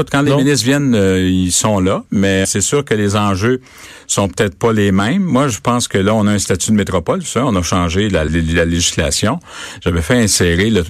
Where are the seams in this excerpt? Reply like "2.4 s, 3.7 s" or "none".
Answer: 2.4 s, 8.3 s